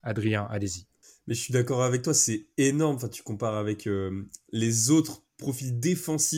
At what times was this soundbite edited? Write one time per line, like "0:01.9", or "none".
none